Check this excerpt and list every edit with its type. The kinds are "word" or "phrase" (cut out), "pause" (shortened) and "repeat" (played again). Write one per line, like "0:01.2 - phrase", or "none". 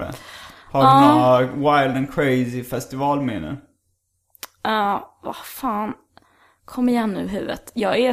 none